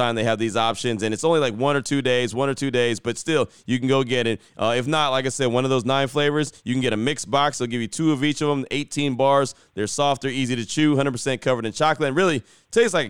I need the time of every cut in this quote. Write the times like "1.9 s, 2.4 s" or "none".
none

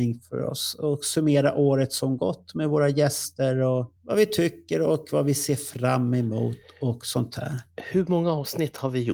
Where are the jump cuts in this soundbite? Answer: 4.0 s

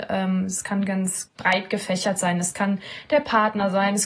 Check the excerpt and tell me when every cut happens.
1.3 s

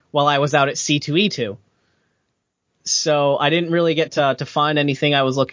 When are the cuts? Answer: none

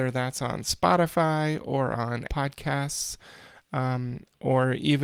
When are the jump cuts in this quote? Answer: 2.3 s

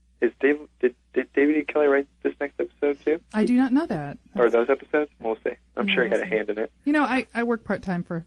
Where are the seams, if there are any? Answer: 5.2 s, 6.8 s

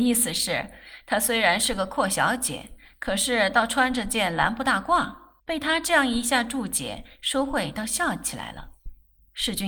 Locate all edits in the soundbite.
5.4 s

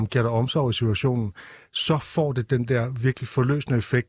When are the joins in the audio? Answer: none

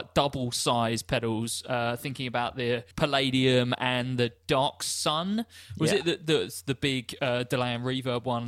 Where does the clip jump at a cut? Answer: 2.9 s

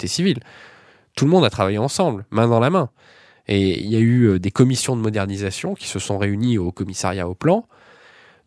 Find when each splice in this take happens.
none

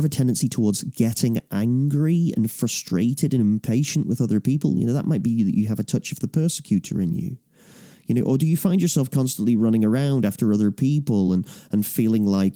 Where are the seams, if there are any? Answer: none

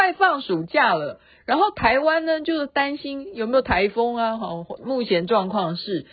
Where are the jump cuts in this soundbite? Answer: 4.8 s

